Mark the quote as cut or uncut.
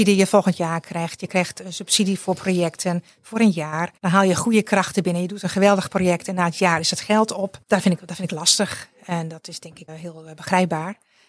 cut